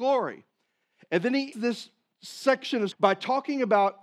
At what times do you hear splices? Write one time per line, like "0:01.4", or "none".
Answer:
0:01.5
0:02.9

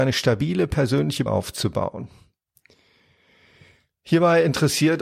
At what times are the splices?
0:01.3

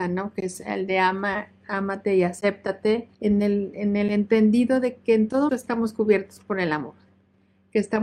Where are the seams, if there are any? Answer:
0:03.1
0:05.5

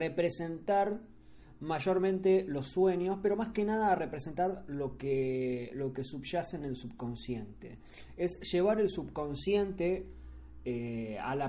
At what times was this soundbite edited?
none

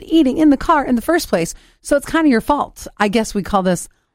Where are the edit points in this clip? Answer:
none

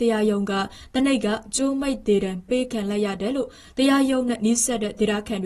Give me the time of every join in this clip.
none

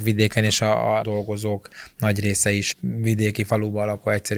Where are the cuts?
0:01.0
0:02.7

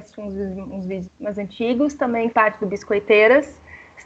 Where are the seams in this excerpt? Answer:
0:01.1
0:02.3

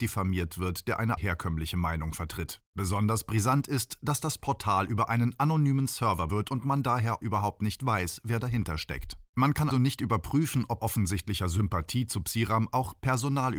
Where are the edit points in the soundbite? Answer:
0:01.2
0:02.7
0:06.3
0:07.2
0:09.3
0:09.7
0:10.8

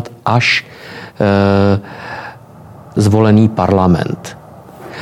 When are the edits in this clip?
0:03.0

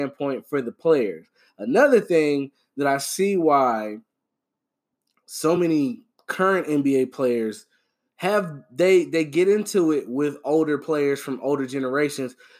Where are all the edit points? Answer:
none

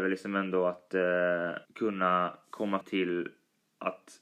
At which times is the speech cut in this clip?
0:01.6
0:02.8

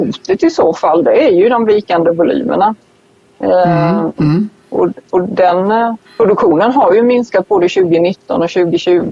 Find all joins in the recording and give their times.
0:06.0

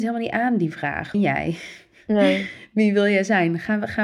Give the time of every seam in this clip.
0:01.1

